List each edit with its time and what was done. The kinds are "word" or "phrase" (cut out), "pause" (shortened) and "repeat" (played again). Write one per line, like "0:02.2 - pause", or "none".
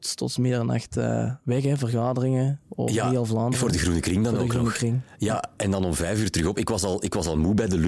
none